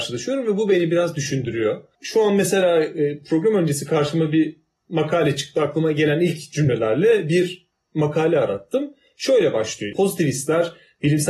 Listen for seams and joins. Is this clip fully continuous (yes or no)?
yes